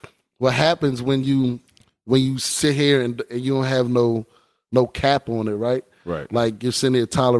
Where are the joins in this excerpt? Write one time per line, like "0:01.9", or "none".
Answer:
none